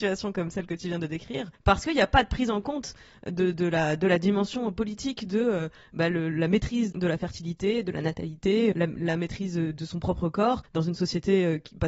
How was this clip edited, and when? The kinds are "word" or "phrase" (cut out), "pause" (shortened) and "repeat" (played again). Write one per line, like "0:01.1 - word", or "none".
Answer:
0:01.6 - pause
0:06.9 - word
0:08.7 - word
0:10.7 - pause